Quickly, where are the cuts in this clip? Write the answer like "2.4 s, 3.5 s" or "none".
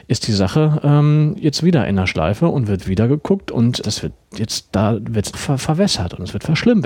3.8 s, 5.3 s